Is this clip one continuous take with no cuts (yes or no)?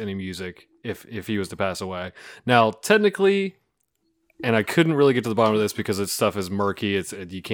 yes